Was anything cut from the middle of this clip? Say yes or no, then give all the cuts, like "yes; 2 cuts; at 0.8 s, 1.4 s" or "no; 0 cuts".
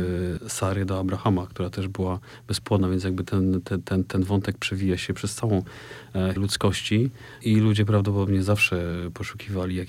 yes; 1 cut; at 6.4 s